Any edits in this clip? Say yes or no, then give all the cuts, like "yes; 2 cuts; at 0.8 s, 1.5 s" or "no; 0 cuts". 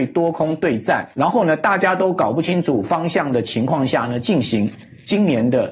yes; 1 cut; at 1.1 s